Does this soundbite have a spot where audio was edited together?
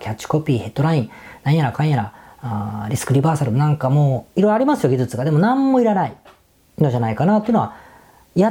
no; 0 cuts

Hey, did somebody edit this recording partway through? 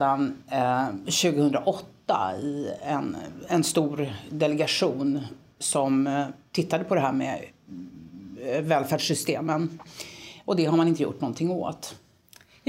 no; 0 cuts

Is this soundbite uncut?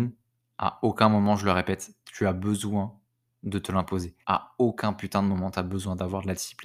no; 1 cut; at 4.2 s

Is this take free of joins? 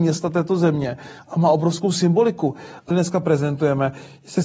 no; 1 cut; at 2.9 s

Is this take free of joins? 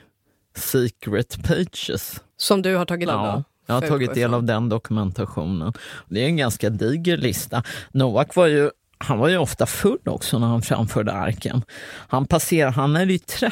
no; 2 cuts; at 2.3 s, 3.1 s

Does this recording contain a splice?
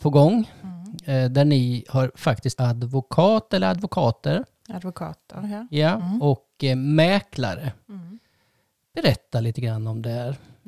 yes; 1 cut; at 2.6 s

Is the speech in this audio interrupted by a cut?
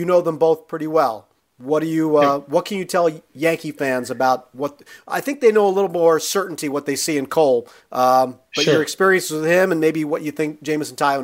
no; 0 cuts

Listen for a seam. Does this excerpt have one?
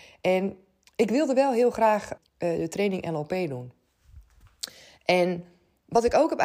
yes; 1 cut; at 2.2 s

